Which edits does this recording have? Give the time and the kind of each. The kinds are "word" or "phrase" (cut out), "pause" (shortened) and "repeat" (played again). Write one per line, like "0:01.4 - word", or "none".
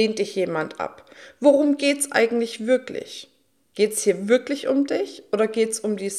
none